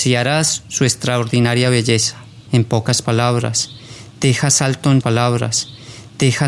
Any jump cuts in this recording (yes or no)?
yes